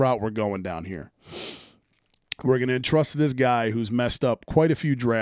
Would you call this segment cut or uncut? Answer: uncut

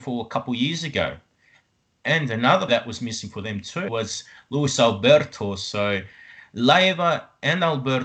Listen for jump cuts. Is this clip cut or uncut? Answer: cut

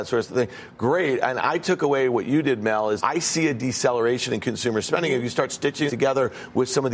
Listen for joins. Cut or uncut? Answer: cut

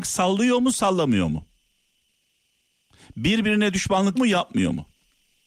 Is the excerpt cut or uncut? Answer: cut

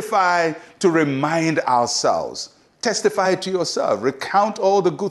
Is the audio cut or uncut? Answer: uncut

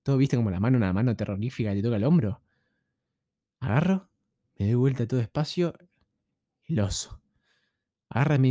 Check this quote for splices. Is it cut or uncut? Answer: uncut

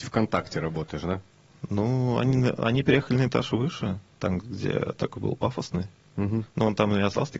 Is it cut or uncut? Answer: uncut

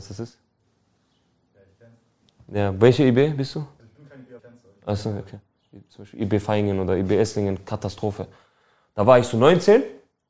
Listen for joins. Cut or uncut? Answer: cut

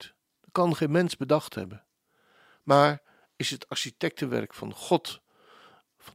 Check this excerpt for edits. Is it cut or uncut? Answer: uncut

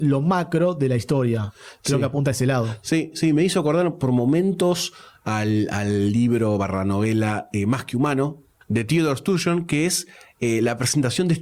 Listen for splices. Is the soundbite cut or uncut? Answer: uncut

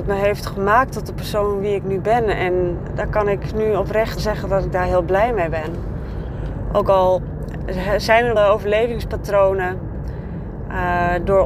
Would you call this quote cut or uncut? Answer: cut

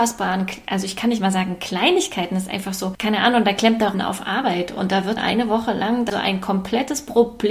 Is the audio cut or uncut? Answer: cut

